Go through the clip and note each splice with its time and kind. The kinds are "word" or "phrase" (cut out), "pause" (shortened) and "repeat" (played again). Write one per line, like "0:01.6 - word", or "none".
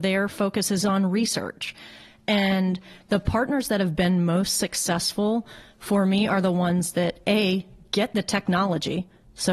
none